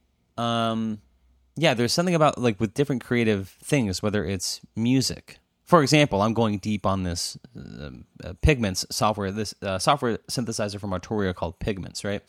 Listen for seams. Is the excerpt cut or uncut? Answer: uncut